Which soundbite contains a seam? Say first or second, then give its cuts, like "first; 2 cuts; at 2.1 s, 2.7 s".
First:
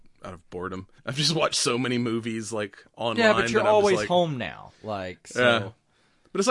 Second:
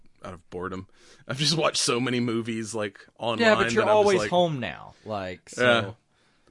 first; 1 cut; at 1.0 s